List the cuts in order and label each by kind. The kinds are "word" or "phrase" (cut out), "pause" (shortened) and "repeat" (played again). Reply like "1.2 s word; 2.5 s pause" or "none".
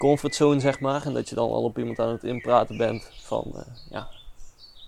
none